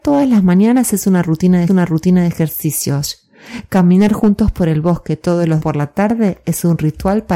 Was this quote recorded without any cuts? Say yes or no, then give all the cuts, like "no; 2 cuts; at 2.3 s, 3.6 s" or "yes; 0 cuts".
no; 2 cuts; at 1.7 s, 5.6 s